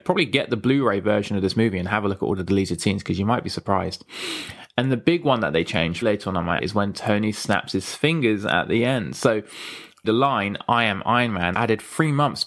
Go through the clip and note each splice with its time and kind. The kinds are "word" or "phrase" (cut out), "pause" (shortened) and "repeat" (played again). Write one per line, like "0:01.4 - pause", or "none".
0:06.0 - word
0:06.6 - word
0:10.0 - word
0:11.5 - word